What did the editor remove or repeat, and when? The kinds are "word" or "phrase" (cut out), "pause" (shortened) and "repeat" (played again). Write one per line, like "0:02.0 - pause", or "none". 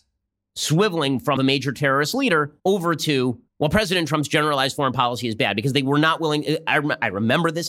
0:01.4 - phrase
0:02.6 - pause
0:03.5 - pause